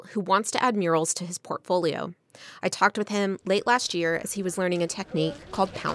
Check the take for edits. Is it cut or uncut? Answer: uncut